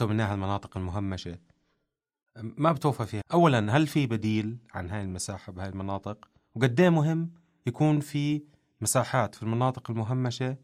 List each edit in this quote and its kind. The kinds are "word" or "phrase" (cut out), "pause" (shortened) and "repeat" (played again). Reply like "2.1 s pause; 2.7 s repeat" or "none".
3.2 s phrase